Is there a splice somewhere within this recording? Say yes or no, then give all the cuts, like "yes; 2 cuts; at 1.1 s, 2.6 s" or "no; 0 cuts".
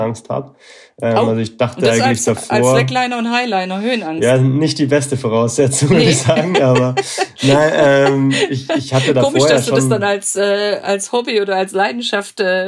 no; 0 cuts